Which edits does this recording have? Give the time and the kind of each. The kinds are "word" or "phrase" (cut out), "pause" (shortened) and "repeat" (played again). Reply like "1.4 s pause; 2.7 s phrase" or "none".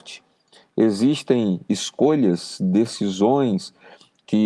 none